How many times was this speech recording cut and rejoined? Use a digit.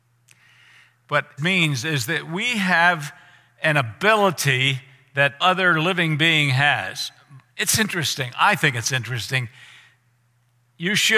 2